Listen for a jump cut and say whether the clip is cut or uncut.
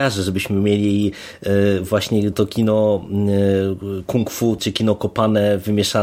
cut